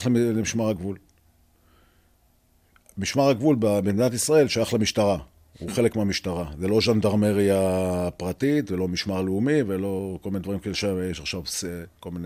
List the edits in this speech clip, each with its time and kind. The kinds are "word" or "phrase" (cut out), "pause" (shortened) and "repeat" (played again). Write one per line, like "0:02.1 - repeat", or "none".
none